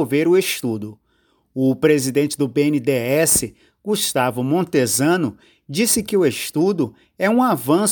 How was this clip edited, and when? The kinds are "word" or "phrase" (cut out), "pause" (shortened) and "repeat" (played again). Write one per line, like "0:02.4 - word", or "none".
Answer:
none

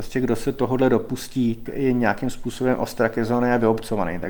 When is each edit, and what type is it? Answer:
0:01.7 - word

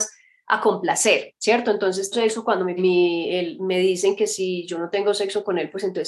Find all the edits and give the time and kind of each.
0:02.1 - word
0:02.8 - phrase

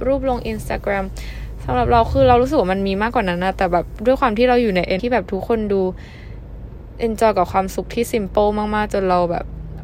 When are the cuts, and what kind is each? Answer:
0:05.0 - word

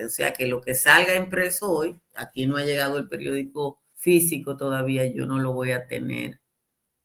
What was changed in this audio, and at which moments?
0:03.9 - pause

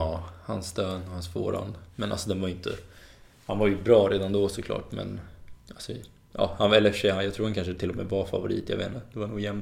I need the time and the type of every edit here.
none

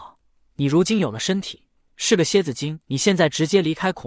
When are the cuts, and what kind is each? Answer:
0:02.8 - pause

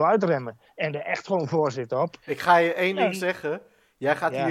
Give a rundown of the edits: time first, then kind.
0:02.2 - pause

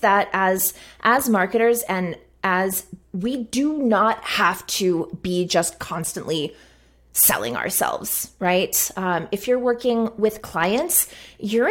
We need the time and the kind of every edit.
0:03.0 - word

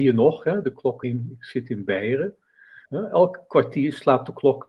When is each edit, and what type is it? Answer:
0:01.0 - word
0:02.9 - pause

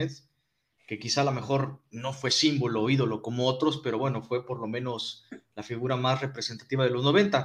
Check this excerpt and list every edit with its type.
none

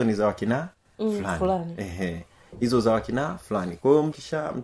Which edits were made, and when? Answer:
none

